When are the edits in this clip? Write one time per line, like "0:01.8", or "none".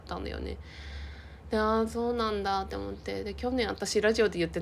none